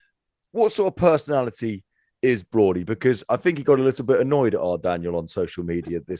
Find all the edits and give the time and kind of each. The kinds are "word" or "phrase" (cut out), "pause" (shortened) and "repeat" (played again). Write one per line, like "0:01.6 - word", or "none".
none